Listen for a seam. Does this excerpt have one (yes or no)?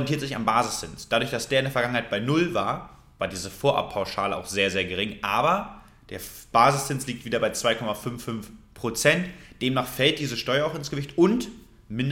no